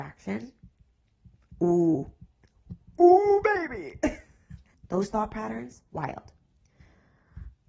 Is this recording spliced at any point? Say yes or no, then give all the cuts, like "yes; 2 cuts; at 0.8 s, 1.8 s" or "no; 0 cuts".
yes; 1 cut; at 5.9 s